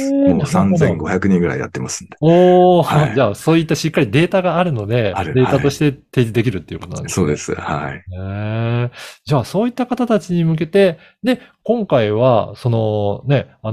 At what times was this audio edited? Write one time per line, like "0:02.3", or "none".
none